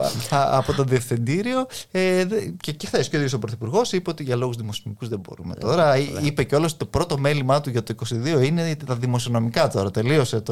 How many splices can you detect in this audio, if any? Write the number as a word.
zero